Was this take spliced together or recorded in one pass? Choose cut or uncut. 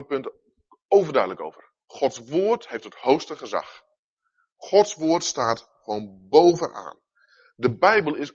uncut